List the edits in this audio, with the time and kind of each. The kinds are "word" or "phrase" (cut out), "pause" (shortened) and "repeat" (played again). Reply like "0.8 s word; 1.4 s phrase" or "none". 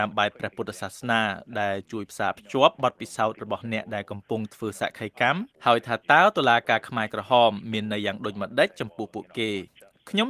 5.5 s pause